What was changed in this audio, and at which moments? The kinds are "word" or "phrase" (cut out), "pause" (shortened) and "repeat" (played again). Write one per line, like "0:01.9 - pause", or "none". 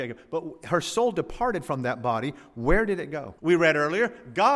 0:03.4 - pause